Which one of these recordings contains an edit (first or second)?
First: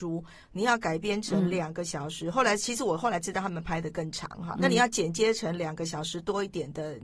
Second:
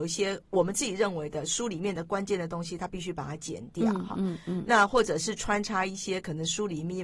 first